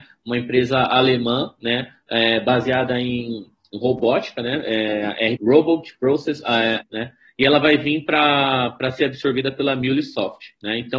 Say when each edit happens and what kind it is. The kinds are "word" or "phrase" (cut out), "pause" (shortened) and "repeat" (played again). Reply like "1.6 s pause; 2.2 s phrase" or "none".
5.4 s word; 6.8 s word